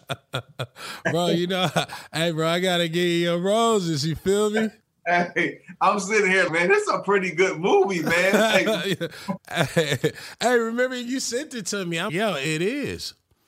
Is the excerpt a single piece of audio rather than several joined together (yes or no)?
no